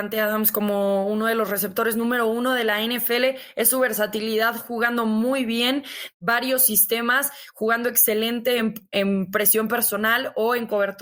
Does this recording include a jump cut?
no; 0 cuts

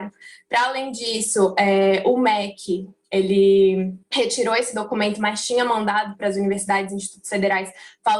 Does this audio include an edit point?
yes; 1 cut; at 4.0 s

